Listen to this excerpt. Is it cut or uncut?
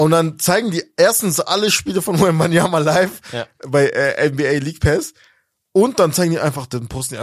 uncut